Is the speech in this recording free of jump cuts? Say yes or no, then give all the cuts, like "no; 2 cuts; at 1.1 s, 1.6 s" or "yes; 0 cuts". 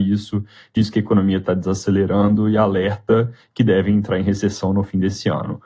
yes; 0 cuts